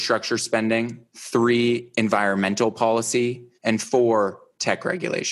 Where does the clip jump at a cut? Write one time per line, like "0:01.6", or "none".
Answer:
0:01.1
0:03.5